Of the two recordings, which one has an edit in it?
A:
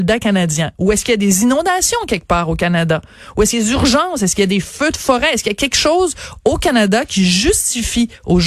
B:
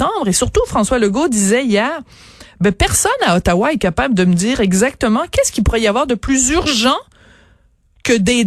A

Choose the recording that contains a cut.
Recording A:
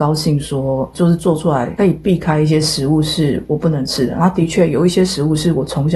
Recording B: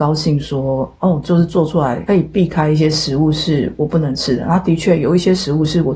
A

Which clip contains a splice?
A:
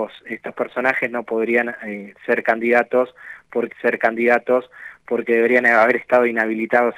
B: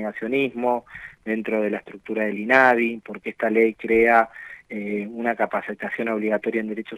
A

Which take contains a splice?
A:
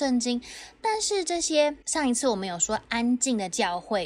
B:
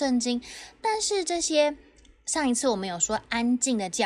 A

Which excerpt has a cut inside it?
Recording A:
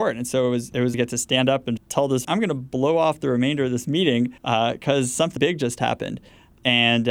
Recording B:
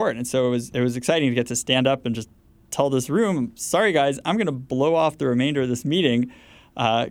A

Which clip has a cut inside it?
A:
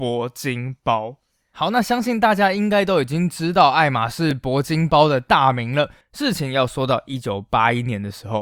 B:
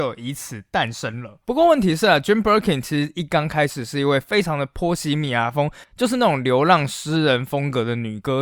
B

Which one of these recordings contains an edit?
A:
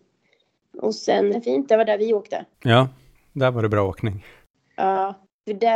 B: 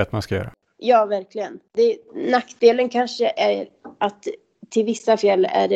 A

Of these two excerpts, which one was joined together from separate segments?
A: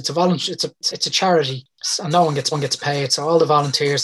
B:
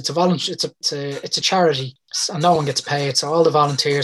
A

